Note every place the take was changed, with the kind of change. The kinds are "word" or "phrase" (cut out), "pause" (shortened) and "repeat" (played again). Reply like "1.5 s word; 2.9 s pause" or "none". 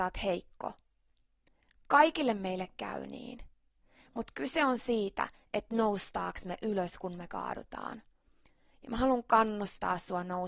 none